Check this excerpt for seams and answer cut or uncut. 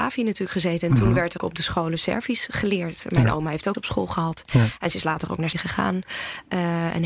cut